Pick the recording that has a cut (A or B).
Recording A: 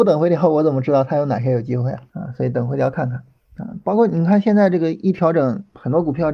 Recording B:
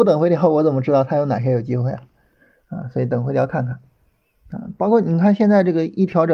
A